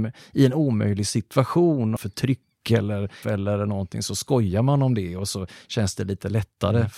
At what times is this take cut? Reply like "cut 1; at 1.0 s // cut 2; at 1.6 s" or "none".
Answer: cut 1; at 2.0 s // cut 2; at 3.2 s